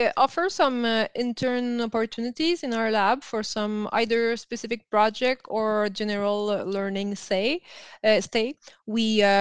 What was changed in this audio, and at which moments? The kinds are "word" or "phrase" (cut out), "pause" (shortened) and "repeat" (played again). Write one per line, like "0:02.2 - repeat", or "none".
none